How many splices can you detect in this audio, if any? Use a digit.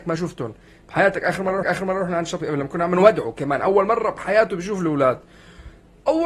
2